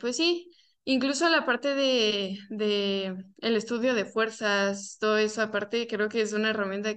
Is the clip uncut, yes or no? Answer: yes